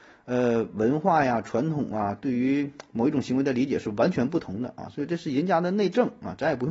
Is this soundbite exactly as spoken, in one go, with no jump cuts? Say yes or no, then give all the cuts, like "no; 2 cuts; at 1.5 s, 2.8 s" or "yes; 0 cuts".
yes; 0 cuts